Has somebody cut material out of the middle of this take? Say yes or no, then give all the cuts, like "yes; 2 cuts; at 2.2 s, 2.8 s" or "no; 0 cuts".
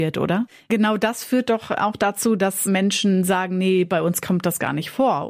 no; 0 cuts